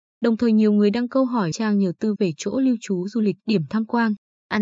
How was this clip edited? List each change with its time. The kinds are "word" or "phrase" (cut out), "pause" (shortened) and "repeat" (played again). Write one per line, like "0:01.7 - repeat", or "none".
0:01.5 - word
0:02.2 - word
0:03.4 - pause